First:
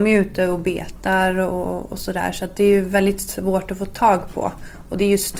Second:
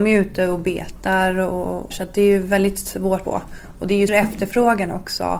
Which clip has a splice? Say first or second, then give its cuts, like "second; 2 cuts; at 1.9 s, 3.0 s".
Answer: second; 3 cuts; at 1.9 s, 3.2 s, 4.1 s